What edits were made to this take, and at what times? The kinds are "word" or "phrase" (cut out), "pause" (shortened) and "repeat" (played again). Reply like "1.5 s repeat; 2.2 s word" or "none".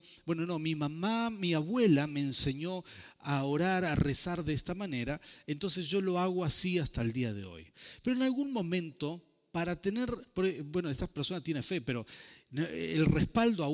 none